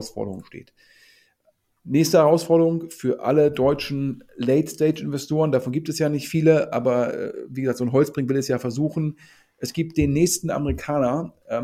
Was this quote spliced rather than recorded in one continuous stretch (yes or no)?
no